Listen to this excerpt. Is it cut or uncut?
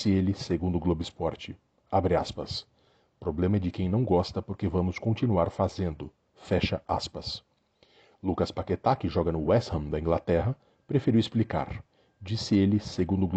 uncut